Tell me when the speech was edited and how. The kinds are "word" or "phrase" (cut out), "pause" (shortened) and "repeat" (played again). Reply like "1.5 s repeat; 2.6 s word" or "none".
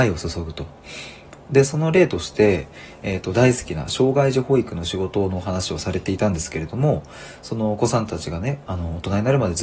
none